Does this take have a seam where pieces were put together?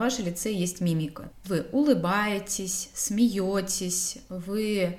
yes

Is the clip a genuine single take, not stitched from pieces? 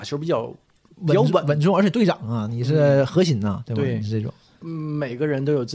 yes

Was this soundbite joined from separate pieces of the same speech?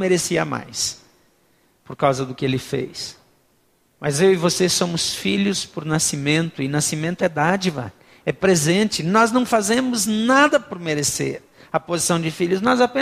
no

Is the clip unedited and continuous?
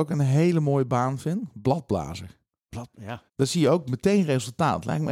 no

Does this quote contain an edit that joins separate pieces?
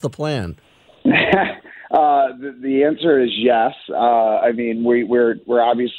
no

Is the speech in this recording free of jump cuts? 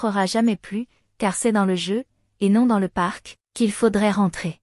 yes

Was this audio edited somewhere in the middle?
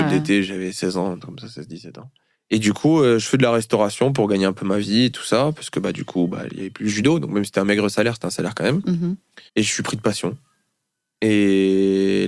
yes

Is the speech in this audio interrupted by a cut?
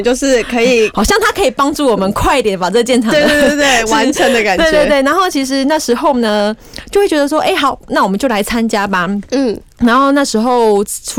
no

